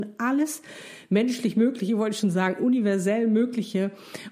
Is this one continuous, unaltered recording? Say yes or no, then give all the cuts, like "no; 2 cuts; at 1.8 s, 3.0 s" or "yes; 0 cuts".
yes; 0 cuts